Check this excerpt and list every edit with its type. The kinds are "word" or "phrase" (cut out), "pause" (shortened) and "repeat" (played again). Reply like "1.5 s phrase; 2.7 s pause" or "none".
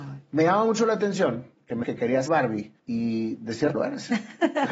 1.8 s word; 2.3 s word; 2.8 s pause; 3.7 s word